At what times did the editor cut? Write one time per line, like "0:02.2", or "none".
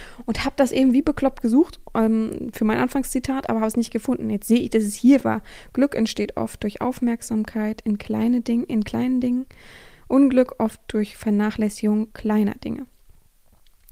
none